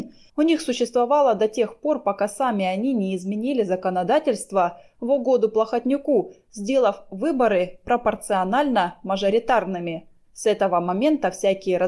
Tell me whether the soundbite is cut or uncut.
uncut